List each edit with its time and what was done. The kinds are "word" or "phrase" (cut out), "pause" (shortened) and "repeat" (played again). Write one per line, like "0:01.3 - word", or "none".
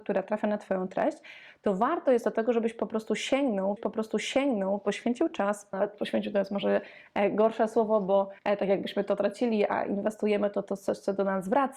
0:03.8 - repeat
0:05.7 - word
0:08.4 - pause